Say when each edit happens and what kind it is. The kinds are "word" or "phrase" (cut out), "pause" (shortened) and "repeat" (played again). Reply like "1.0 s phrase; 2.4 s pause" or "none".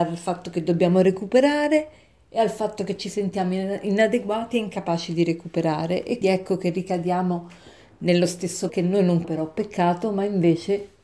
6.2 s word; 8.7 s word; 9.2 s word